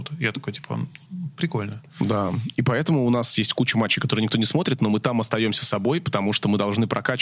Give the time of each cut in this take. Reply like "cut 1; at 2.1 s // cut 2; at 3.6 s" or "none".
none